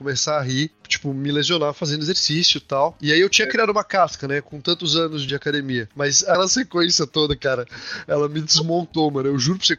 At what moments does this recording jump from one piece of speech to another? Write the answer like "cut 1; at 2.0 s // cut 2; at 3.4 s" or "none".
none